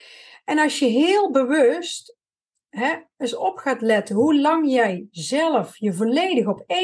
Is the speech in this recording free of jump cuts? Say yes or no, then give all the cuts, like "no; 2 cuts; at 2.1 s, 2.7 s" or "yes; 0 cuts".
yes; 0 cuts